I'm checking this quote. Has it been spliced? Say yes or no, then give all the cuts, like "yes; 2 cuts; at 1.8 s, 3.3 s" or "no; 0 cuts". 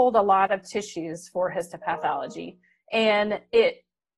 no; 0 cuts